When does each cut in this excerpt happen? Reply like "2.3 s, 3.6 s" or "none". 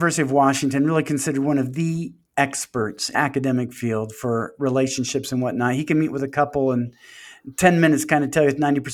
3.1 s

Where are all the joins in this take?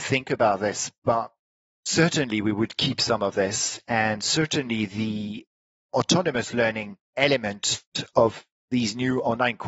7.1 s

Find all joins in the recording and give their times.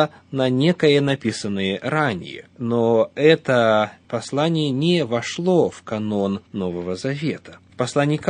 2.5 s, 6.4 s

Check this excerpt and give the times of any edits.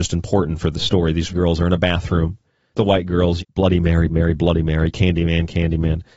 1.3 s, 2.8 s, 3.4 s, 4.1 s, 4.9 s

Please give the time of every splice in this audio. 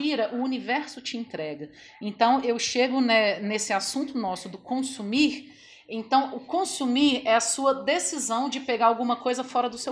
none

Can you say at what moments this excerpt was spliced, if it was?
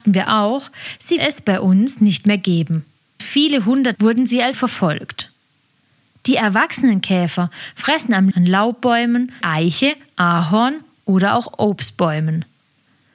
1.2 s, 3.2 s, 3.9 s, 4.5 s, 8.3 s, 9.4 s

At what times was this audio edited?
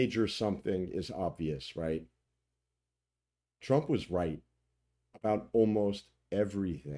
none

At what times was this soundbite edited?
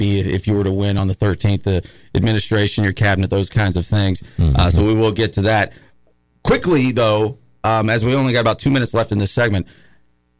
none

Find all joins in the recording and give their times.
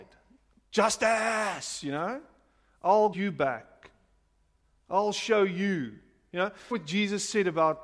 3.1 s, 6.7 s

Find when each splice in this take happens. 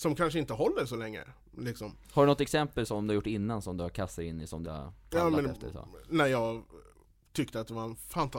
4.6 s

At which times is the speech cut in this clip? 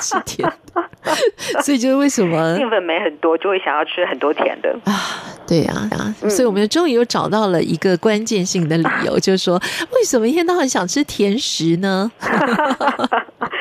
5.9 s

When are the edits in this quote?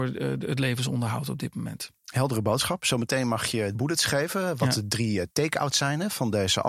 3.8 s

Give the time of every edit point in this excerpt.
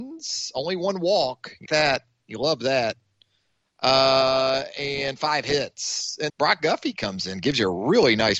1.7 s, 6.3 s

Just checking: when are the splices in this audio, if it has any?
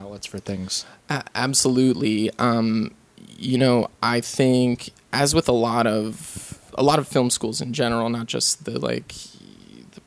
6.6 s

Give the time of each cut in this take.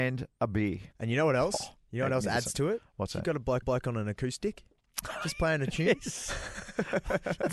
0.9 s, 3.6 s

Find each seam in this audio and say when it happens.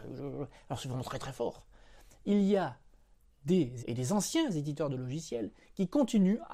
3.8 s

